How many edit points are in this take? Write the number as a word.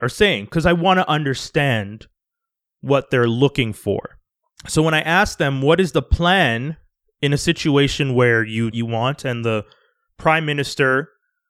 two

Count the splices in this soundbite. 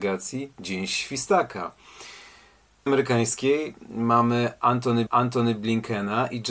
two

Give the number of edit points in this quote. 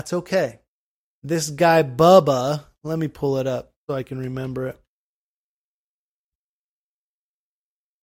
two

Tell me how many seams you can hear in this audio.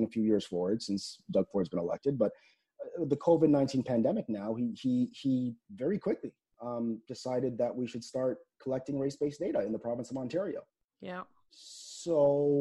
zero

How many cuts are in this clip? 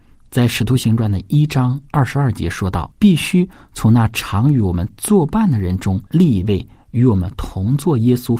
two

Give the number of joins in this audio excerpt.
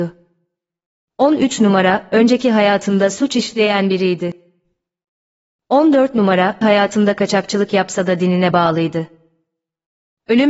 one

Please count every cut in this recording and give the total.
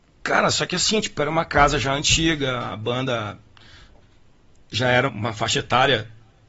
one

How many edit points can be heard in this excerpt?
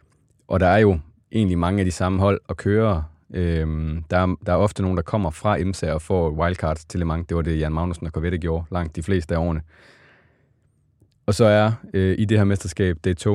zero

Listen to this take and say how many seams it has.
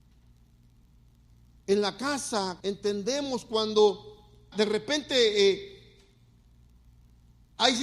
two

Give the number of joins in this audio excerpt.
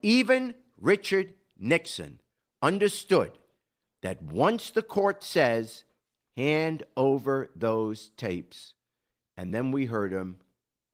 zero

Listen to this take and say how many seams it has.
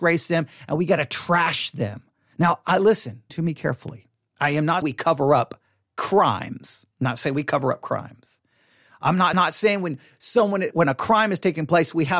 five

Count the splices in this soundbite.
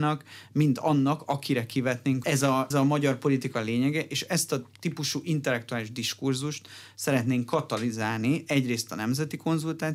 two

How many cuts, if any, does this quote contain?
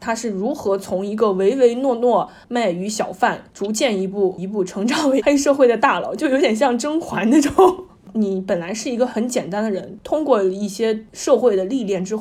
one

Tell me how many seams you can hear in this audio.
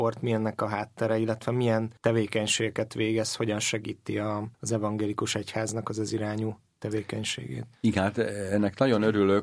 three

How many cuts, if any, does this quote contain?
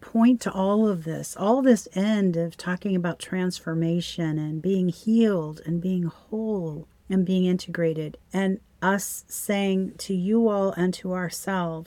two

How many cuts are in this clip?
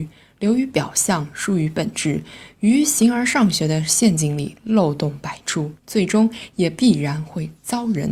one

